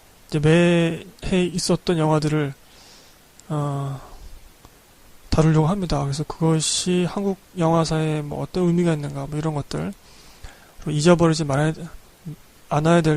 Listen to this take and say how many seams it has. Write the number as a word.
two